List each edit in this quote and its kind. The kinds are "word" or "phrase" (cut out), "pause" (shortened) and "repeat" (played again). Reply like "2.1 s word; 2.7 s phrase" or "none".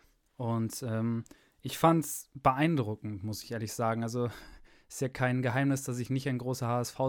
none